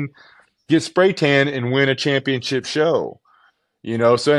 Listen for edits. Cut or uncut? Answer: uncut